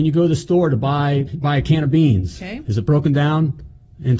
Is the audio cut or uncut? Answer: cut